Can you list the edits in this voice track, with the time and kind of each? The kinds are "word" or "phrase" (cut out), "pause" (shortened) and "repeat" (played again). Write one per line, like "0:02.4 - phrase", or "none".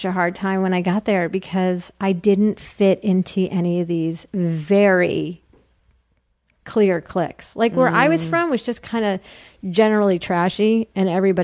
none